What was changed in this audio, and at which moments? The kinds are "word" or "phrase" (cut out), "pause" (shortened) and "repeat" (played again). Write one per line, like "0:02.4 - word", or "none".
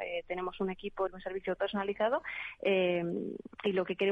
0:01.1 - word
0:01.6 - word